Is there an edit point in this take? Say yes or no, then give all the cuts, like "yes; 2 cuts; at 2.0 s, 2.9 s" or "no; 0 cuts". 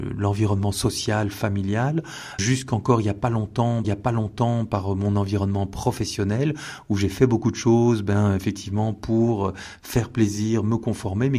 yes; 2 cuts; at 2.4 s, 3.8 s